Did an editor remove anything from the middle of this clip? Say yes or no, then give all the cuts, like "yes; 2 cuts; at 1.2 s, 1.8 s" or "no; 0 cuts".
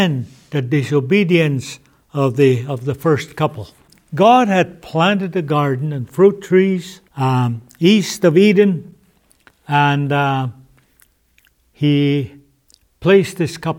yes; 1 cut; at 7.1 s